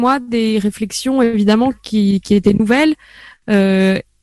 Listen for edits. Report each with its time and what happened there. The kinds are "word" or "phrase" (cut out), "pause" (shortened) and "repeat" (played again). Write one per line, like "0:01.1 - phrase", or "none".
none